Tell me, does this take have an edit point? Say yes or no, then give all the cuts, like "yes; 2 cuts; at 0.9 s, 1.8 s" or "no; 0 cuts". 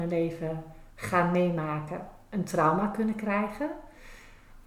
no; 0 cuts